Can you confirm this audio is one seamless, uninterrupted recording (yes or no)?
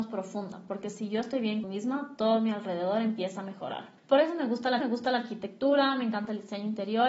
no